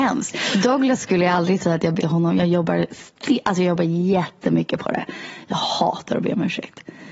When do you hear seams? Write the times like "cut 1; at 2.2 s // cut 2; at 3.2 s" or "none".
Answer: cut 1; at 2.0 s